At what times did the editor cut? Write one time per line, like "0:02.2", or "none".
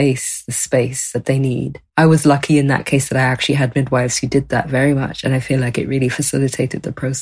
0:01.9